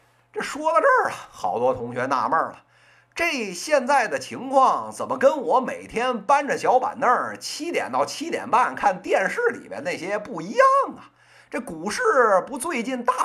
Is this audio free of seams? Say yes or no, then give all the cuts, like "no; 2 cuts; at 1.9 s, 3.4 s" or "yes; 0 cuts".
yes; 0 cuts